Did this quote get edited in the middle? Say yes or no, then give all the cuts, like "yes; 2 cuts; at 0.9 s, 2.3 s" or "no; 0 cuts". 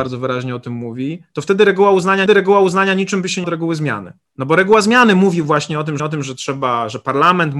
yes; 4 cuts; at 2.3 s, 3.4 s, 4.3 s, 6.0 s